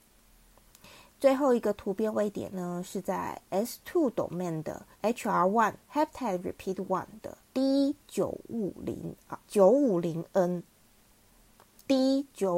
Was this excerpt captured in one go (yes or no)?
no